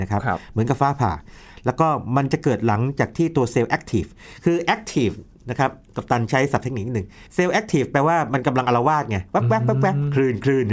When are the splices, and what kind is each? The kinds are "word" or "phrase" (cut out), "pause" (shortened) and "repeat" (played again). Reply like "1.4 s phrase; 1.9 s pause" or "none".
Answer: 7.3 s pause